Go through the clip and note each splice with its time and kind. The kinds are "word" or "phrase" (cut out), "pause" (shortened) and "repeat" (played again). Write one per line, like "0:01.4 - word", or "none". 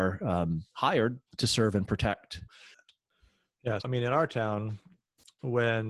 0:01.3 - pause
0:03.8 - word